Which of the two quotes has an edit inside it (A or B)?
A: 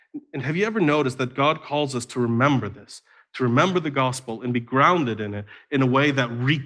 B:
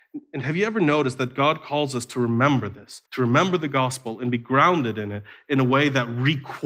B